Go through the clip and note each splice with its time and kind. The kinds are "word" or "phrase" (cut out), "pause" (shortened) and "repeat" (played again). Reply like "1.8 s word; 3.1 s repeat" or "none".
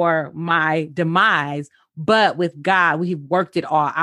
none